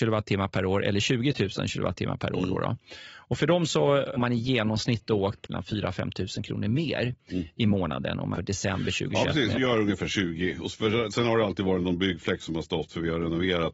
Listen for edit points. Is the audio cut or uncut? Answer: cut